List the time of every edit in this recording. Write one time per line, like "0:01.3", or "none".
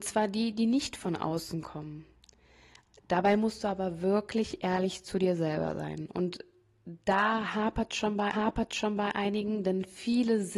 0:08.3